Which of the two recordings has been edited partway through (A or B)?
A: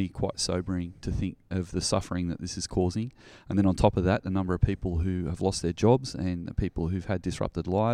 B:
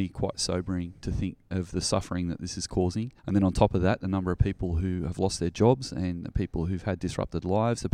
B